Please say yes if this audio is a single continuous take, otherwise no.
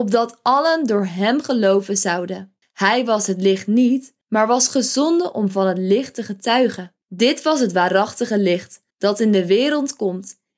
no